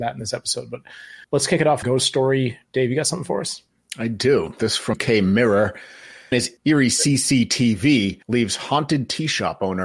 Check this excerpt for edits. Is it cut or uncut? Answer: cut